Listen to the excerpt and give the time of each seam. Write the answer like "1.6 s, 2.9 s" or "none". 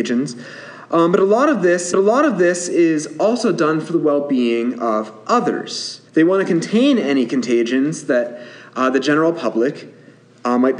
1.9 s, 6.1 s